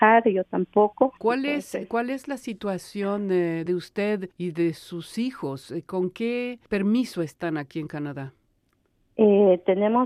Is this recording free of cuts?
no; 4 cuts; at 1.2 s, 3.7 s, 4.3 s, 6.7 s

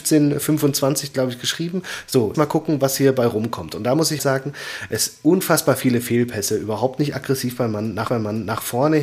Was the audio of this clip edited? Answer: yes; 3 cuts; at 2.3 s, 4.2 s, 8.1 s

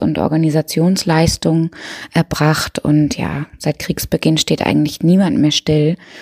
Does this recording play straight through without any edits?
yes; 0 cuts

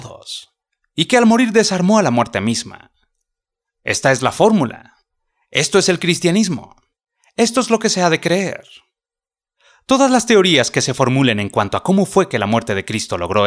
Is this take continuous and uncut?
yes; 0 cuts

